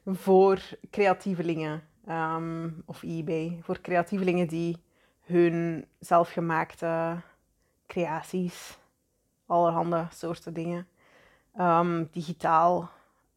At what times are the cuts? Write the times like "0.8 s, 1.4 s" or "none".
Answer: none